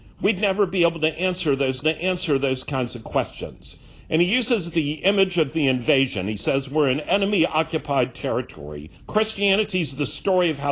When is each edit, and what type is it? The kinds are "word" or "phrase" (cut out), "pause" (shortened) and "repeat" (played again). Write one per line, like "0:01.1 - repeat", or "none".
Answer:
0:01.8 - repeat
0:09.0 - pause

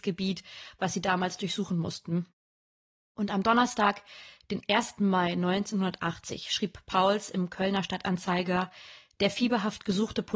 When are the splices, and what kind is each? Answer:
none

